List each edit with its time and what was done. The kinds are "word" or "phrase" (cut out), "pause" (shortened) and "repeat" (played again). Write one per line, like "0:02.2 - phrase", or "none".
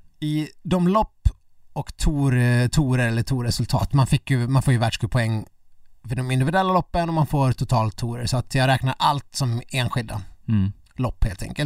none